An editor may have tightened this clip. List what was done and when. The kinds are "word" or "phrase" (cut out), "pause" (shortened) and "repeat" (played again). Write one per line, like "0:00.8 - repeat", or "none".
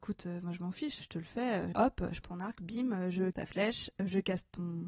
0:01.0 - word
0:01.7 - word
0:02.2 - word
0:03.3 - word